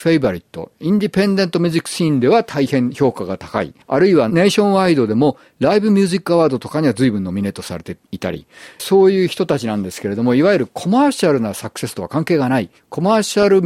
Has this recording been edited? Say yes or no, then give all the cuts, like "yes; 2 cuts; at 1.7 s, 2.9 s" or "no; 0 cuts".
yes; 2 cuts; at 3.8 s, 8.8 s